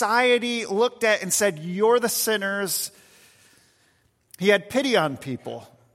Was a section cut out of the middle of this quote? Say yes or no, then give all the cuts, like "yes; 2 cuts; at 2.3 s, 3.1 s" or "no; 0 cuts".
no; 0 cuts